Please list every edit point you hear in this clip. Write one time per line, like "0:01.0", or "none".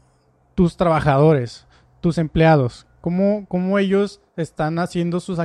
none